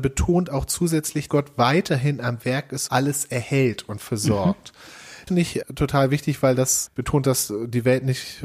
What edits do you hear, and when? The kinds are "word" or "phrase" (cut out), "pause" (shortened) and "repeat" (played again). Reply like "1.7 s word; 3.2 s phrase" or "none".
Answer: 1.3 s word; 2.9 s word; 5.3 s word; 5.6 s word; 6.9 s word